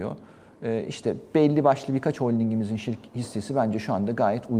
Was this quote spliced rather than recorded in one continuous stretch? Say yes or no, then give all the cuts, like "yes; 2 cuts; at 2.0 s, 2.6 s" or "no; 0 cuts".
no; 0 cuts